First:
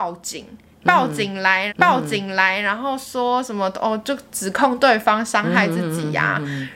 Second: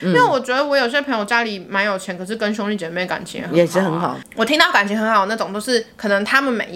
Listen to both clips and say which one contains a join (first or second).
first